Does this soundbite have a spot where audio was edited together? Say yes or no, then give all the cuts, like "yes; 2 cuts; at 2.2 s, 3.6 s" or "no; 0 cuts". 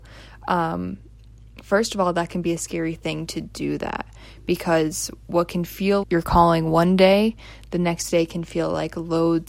yes; 1 cut; at 6.0 s